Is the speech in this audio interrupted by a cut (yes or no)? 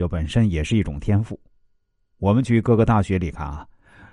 no